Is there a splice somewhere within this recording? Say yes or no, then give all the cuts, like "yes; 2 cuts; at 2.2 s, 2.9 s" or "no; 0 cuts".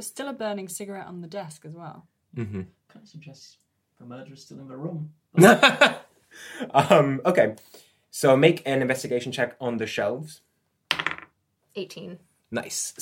no; 0 cuts